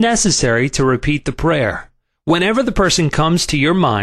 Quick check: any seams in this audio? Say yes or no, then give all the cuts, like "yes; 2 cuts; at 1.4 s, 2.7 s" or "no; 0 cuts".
no; 0 cuts